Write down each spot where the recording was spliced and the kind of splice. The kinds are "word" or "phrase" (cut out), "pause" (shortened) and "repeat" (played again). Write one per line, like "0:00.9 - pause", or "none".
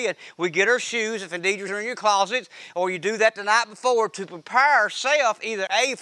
0:01.7 - word
0:02.7 - word